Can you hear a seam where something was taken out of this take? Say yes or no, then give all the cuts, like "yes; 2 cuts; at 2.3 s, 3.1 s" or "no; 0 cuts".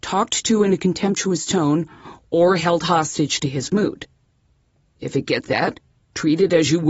yes; 1 cut; at 5.4 s